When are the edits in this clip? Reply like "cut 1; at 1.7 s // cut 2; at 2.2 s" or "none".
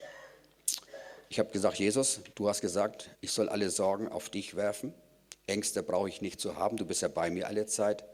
cut 1; at 2.3 s // cut 2; at 3.1 s